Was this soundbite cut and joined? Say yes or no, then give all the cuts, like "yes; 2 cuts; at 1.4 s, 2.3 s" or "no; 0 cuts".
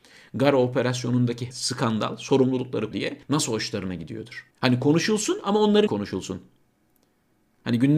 yes; 5 cuts; at 1.5 s, 2.9 s, 3.2 s, 4.5 s, 5.9 s